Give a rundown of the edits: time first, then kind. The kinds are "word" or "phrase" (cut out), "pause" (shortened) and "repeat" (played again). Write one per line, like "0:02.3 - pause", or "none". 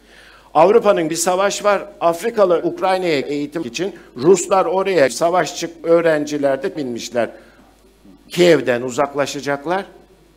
0:01.1 - word
0:02.6 - word
0:03.2 - word
0:03.6 - word
0:05.1 - word
0:05.8 - word
0:06.8 - word